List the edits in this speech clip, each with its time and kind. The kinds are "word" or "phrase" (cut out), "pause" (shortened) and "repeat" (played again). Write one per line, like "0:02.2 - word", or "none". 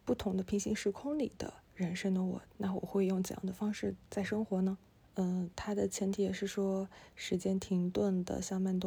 0:02.5 - pause
0:05.0 - pause